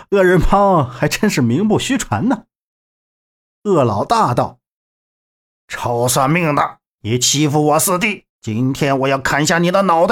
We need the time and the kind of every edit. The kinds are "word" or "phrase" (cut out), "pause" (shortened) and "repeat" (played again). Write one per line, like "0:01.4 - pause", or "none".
0:08.3 - pause